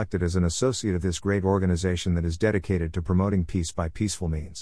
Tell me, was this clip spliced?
no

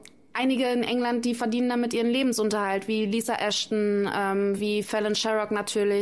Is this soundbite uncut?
yes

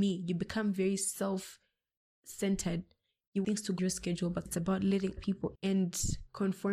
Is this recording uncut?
no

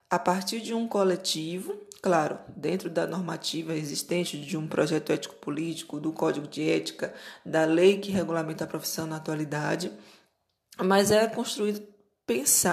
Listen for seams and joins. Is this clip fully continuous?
yes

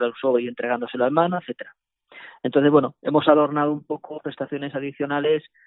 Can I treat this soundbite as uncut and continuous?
no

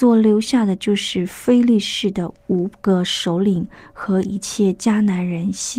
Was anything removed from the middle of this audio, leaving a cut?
no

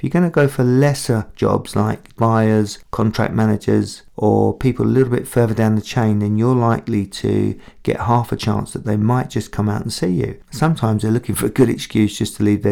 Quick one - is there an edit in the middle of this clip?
yes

